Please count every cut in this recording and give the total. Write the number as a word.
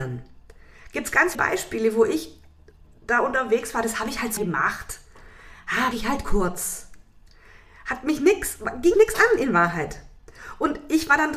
four